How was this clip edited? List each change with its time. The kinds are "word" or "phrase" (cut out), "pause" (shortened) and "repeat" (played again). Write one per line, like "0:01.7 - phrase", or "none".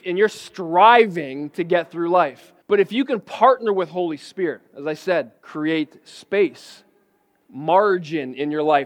0:02.6 - pause
0:04.7 - pause
0:05.4 - pause